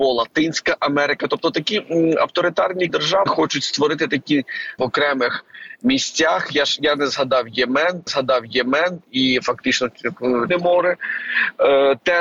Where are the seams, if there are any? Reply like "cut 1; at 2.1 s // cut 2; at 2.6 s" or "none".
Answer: cut 1; at 2.9 s // cut 2; at 3.3 s // cut 3; at 4.8 s // cut 4; at 8.1 s // cut 5; at 10.5 s